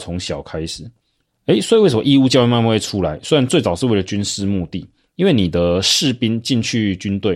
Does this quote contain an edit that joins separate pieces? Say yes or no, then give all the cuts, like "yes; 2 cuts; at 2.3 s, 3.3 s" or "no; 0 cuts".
no; 0 cuts